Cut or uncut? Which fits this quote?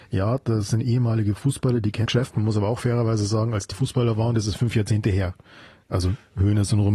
cut